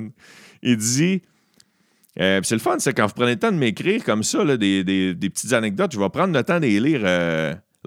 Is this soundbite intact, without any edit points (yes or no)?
yes